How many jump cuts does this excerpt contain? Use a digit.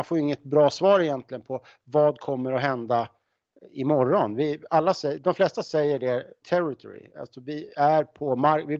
1